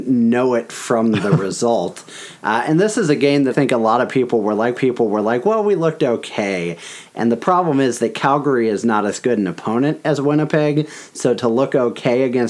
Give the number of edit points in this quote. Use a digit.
2